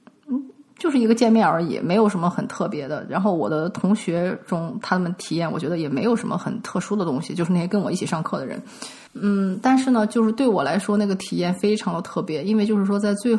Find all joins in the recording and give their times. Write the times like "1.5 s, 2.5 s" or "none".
9.1 s

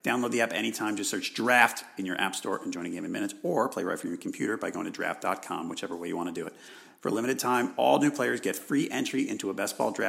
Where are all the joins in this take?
none

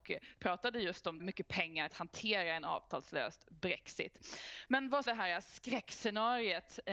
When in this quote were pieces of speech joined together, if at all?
1.2 s, 1.9 s, 5.1 s

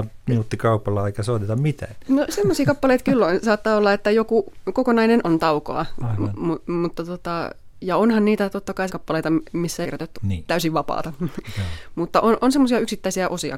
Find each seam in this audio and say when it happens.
5.2 s, 8.9 s, 9.8 s, 10.1 s

